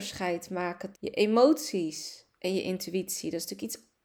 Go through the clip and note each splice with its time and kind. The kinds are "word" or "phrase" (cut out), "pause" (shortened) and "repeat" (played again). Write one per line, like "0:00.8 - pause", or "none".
0:00.9 - word